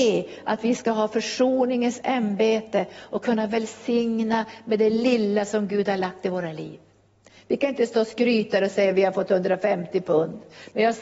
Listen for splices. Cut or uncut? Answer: uncut